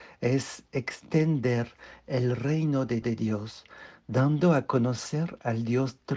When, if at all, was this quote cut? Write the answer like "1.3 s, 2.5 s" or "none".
3.0 s